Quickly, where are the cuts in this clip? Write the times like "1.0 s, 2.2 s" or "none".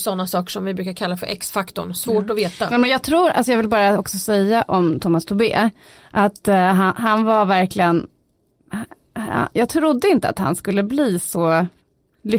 none